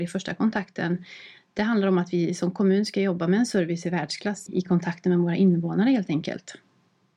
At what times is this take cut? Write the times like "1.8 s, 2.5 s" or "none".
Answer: 4.5 s

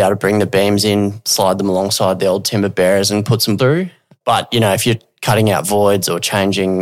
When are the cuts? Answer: 3.6 s

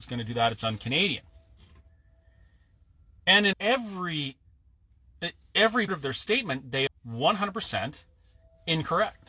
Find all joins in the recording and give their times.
3.5 s, 5.9 s, 6.9 s

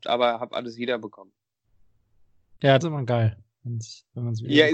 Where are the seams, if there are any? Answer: 2.8 s

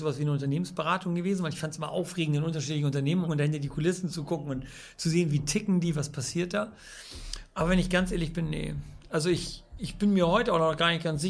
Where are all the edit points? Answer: 3.2 s, 9.8 s

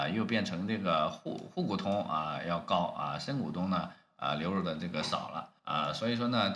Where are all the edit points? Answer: 5.6 s

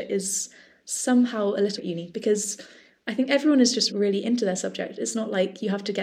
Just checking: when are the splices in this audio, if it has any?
1.8 s, 3.9 s

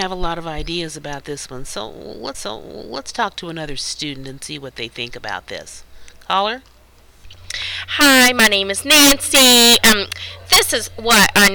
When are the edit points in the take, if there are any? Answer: 2.3 s

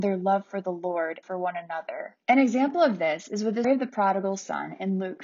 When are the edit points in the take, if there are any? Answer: 1.2 s, 2.2 s, 3.6 s

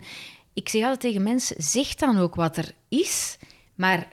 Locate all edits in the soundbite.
none

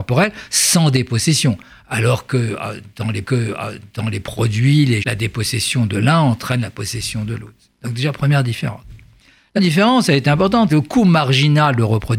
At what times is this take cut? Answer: 3.2 s, 5.0 s, 9.6 s, 10.7 s

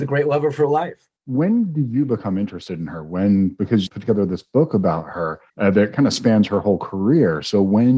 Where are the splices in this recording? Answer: 1.2 s, 3.9 s, 5.5 s

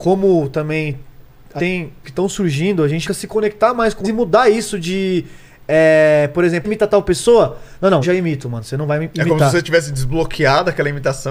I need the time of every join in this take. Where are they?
1.6 s, 2.0 s, 3.0 s, 4.0 s, 6.6 s, 8.0 s

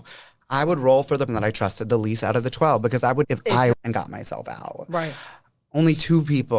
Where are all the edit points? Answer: 1.3 s, 3.2 s, 3.7 s

